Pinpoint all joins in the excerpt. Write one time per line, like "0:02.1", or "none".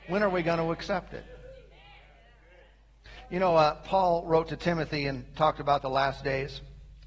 none